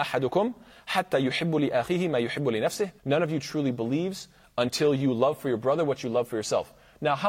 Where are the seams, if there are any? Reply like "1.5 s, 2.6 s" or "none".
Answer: 3.0 s